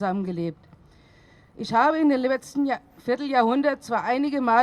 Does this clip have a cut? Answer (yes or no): no